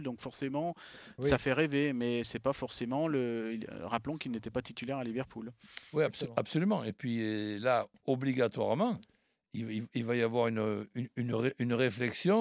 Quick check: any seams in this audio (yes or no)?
no